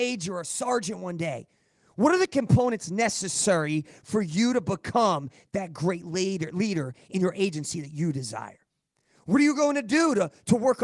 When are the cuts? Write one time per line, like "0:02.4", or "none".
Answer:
none